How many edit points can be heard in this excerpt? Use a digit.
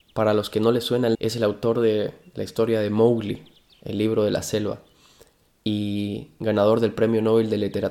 1